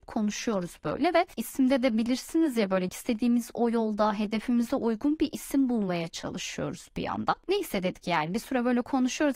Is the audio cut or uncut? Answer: cut